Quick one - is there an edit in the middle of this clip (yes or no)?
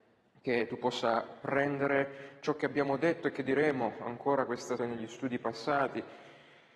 yes